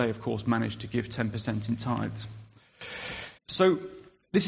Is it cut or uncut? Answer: cut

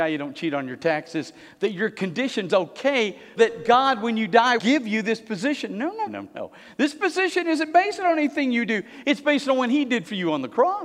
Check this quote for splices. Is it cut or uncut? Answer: cut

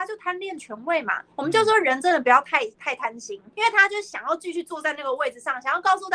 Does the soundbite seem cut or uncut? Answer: cut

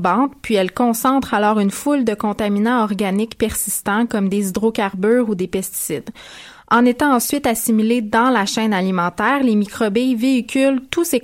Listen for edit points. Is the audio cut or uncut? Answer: uncut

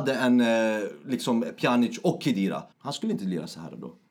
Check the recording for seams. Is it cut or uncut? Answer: cut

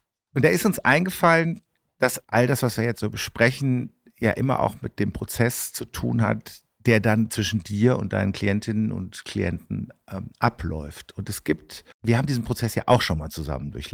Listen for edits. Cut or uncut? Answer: cut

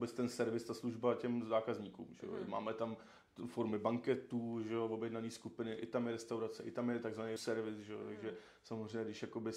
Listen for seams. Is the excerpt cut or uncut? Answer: cut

